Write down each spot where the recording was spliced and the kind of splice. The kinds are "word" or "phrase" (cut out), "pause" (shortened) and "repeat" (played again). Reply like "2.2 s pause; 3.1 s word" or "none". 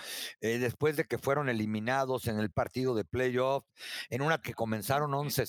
2.5 s word; 4.4 s word